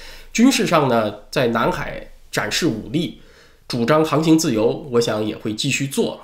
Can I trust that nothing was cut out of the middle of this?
yes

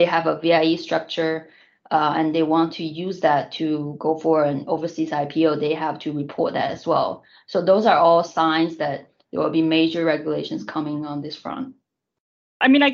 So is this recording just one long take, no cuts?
yes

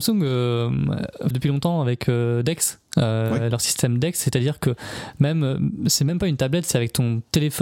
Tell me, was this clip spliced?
yes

